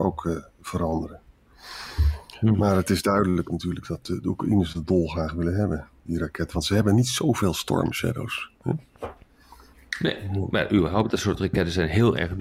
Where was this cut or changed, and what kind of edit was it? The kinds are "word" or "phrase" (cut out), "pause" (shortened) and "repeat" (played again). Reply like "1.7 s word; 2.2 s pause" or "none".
none